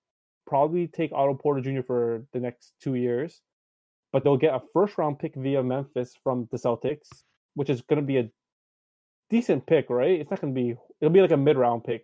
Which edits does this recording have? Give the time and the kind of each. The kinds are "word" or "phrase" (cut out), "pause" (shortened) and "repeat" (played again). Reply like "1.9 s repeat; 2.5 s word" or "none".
4.2 s word

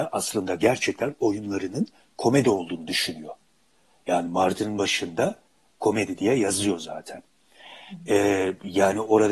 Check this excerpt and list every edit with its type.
none

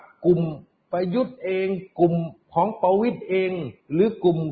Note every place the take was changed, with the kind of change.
2.4 s pause

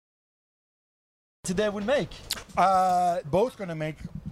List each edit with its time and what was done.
3.2 s word

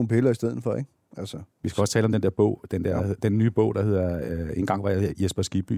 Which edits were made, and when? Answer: 1.5 s pause

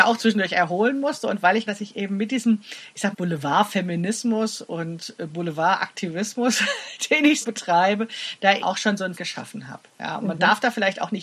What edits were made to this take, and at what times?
1.7 s word; 3.1 s word; 7.4 s word; 8.6 s word; 9.2 s word

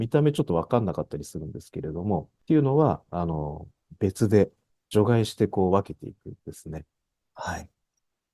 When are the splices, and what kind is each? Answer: 2.4 s pause; 4.7 s pause; 6.4 s pause

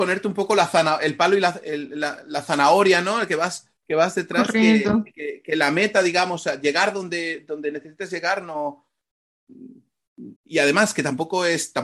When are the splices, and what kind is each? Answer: 3.8 s pause; 10.4 s pause

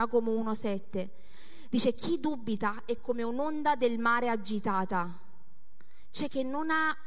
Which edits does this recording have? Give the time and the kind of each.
none

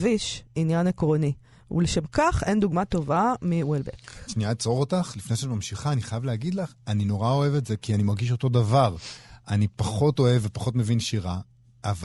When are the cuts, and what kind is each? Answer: none

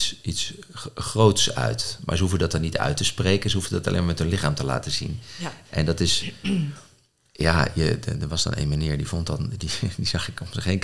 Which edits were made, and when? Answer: none

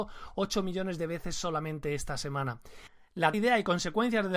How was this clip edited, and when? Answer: 3.3 s word

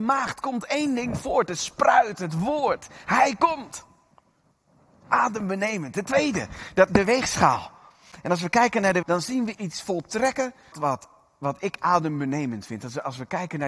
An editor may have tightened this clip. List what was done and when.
6.9 s word; 9.0 s word; 9.5 s word; 10.7 s word

